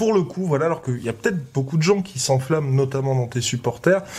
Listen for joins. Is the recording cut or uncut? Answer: uncut